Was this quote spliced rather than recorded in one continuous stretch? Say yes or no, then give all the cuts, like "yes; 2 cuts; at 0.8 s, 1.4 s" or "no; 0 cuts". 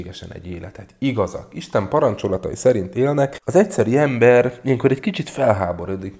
yes; 1 cut; at 3.4 s